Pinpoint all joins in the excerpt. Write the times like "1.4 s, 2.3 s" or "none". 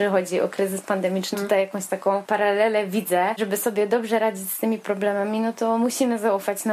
1.3 s, 3.4 s